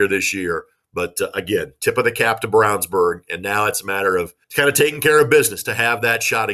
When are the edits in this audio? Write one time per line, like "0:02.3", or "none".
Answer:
0:04.4

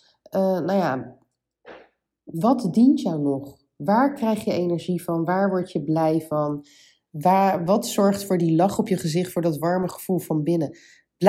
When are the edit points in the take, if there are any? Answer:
none

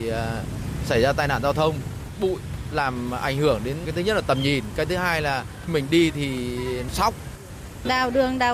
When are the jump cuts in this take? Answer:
0:02.1
0:05.7

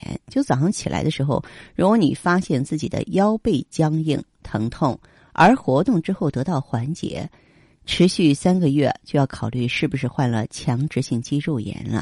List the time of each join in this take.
none

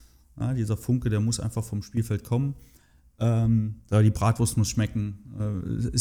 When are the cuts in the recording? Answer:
0:03.8

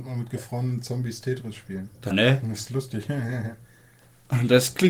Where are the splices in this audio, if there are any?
0:02.1

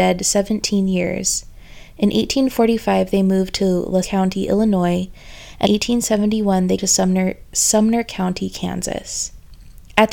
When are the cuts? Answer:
0:04.0
0:05.6
0:06.8

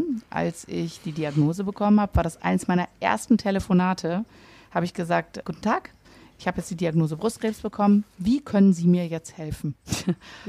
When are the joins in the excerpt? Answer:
0:05.4

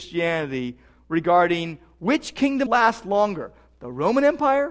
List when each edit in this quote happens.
0:02.7

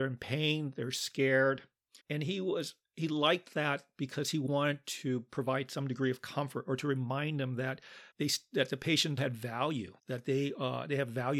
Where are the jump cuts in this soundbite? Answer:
0:02.0
0:08.1
0:09.2
0:10.0

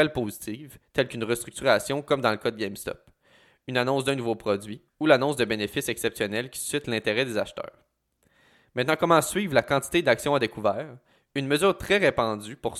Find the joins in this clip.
0:04.9

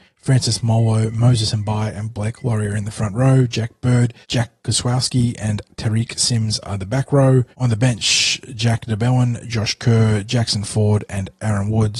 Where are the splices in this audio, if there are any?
0:04.2
0:07.5

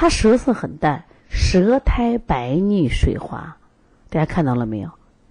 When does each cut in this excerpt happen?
none

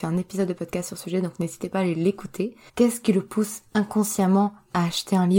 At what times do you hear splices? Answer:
0:02.7

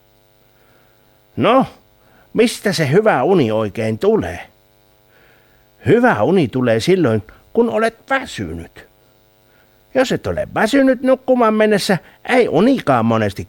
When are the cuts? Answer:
none

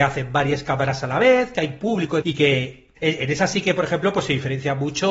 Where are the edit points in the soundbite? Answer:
0:02.2
0:03.0

